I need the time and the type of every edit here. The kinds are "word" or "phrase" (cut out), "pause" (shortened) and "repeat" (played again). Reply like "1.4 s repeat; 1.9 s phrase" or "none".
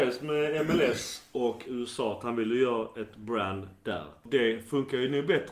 none